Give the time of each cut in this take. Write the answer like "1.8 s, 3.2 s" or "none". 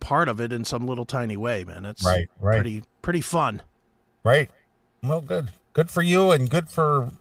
none